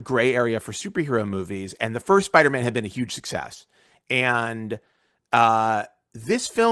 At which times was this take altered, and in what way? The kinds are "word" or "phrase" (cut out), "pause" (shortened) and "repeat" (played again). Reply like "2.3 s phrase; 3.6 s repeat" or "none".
none